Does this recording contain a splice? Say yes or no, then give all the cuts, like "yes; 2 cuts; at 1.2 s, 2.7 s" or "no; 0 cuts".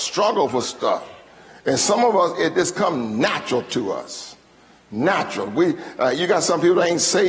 no; 0 cuts